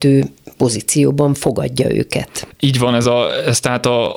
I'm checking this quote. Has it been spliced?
no; 0 cuts

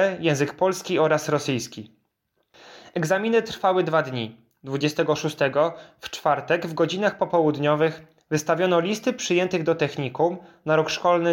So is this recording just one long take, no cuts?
yes; 0 cuts

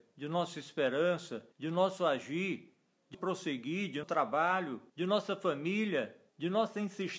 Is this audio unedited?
no; 5 cuts; at 1.5 s, 3.1 s, 4.0 s, 4.9 s, 6.3 s

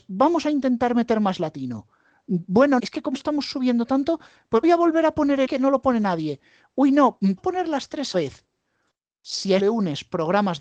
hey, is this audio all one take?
no; 7 cuts; at 2.8 s, 3.1 s, 4.6 s, 5.5 s, 7.4 s, 8.1 s, 9.6 s

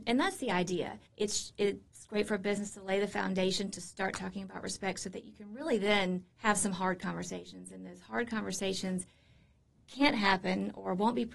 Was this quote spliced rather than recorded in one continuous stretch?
yes; 2 cuts; at 1.1 s, 6.3 s

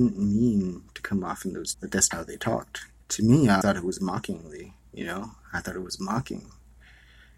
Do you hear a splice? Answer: yes; 4 cuts; at 1.7 s, 2.1 s, 3.0 s, 3.6 s

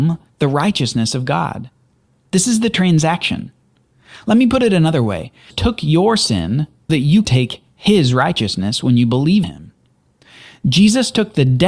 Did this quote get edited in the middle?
yes; 4 cuts; at 5.5 s, 6.9 s, 7.2 s, 9.4 s

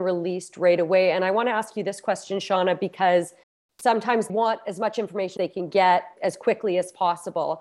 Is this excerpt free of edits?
no; 4 cuts; at 3.4 s, 4.3 s, 5.4 s, 6.2 s

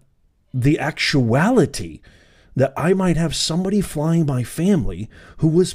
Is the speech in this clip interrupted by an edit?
no; 0 cuts

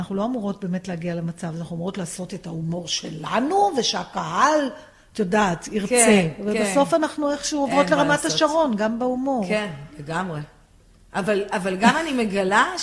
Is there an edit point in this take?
no; 0 cuts

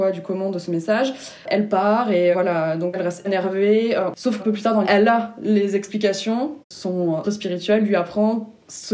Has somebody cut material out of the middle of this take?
yes; 7 cuts; at 2.3 s, 2.9 s, 3.2 s, 4.4 s, 4.8 s, 6.6 s, 7.2 s

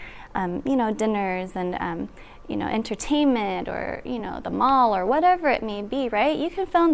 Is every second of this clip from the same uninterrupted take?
yes; 0 cuts

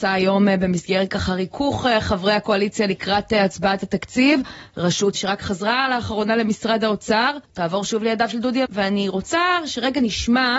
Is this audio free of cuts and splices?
no; 3 cuts; at 5.1 s, 7.4 s, 8.7 s

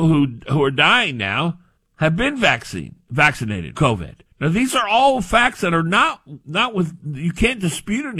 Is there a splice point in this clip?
yes; 4 cuts; at 1.8 s, 3.7 s, 4.3 s, 6.4 s

